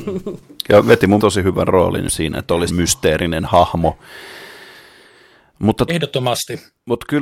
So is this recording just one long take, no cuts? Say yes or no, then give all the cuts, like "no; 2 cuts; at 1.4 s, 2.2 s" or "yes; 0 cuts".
no; 4 cuts; at 1.2 s, 2.1 s, 2.7 s, 5.9 s